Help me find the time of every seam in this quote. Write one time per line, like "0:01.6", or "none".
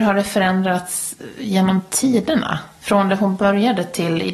none